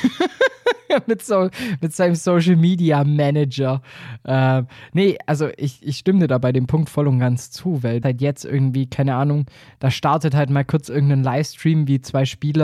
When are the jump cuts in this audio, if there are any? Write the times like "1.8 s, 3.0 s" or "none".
8.0 s